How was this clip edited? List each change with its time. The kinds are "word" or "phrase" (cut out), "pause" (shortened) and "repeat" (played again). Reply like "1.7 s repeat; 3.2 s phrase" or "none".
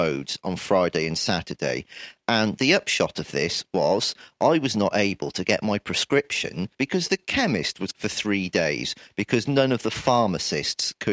6.7 s pause; 7.9 s word